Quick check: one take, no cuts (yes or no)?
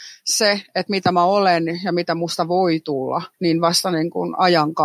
no